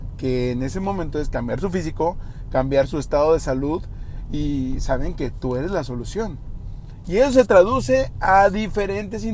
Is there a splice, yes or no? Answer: no